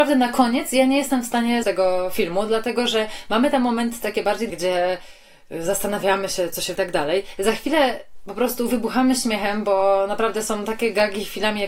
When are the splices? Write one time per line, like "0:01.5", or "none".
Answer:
0:01.6
0:04.5
0:06.7